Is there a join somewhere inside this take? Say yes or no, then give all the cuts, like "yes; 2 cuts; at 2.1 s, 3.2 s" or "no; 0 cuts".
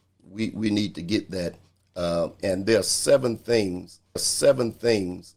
yes; 2 cuts; at 2.4 s, 4.2 s